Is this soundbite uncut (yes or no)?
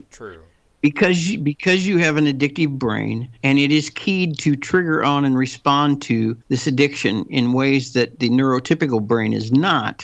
no